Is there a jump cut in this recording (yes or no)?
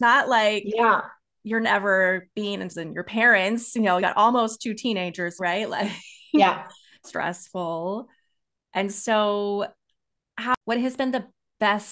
yes